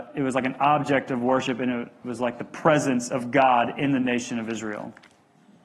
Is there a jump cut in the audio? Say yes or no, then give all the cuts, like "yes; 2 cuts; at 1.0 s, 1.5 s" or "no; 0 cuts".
no; 0 cuts